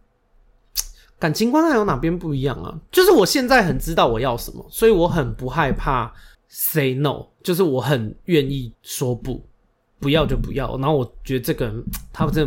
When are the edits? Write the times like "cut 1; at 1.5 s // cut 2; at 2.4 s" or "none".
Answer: cut 1; at 6.3 s // cut 2; at 8.7 s